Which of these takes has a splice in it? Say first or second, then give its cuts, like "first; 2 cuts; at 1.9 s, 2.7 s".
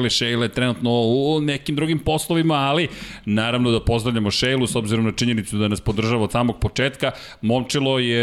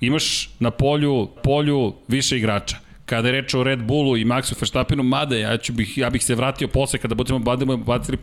second; 1 cut; at 1.4 s